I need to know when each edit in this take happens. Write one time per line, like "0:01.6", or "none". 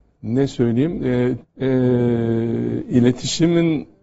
0:01.4